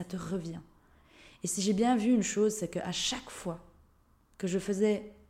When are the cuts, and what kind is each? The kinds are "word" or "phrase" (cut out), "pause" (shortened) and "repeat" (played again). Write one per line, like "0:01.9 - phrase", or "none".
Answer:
none